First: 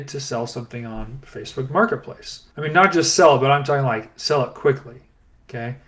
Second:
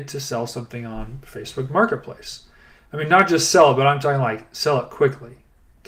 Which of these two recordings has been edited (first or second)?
first